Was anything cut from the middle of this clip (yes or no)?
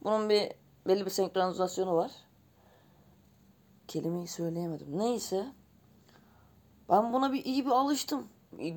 no